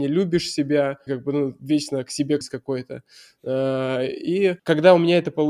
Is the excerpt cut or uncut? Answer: cut